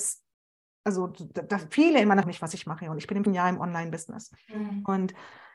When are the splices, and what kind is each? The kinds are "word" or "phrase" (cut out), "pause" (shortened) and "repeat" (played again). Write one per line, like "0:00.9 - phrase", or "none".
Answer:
0:02.2 - phrase
0:03.3 - word